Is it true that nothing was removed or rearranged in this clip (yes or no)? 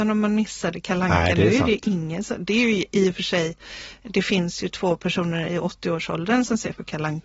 yes